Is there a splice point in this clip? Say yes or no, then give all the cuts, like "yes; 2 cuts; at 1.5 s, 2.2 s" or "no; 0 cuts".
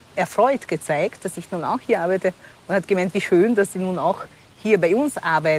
no; 0 cuts